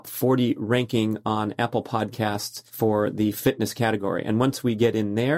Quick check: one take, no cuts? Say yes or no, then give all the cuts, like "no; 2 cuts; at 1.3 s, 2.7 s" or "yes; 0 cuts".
no; 1 cut; at 2.7 s